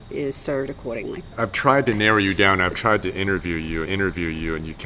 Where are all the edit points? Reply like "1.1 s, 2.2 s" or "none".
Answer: 3.8 s